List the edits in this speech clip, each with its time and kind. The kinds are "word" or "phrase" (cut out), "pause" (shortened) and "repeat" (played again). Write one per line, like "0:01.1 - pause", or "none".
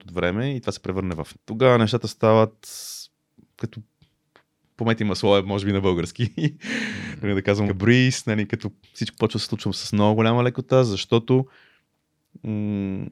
0:01.3 - word
0:07.7 - word